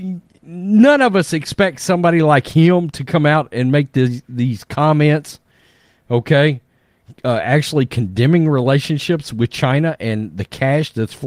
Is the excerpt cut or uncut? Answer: uncut